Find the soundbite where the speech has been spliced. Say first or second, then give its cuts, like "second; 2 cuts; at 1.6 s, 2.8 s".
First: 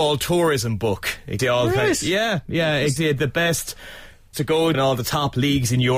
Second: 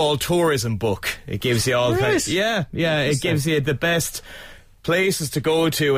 first; 4 cuts; at 1.4 s, 3.0 s, 4.3 s, 4.7 s